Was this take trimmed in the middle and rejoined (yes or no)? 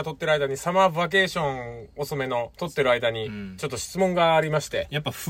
yes